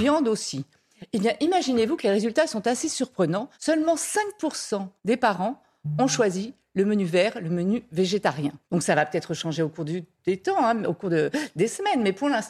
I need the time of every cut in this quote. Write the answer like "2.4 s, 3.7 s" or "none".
3.5 s, 5.0 s, 8.6 s